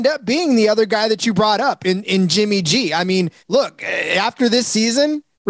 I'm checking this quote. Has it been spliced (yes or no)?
yes